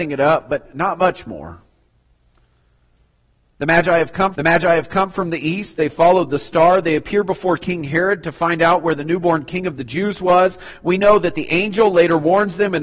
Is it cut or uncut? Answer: cut